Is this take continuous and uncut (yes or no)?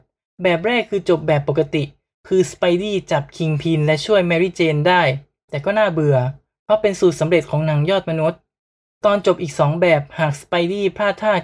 yes